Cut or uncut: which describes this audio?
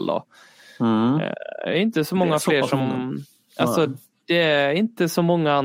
uncut